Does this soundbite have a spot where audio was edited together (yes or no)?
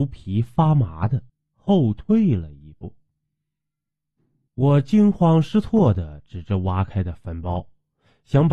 no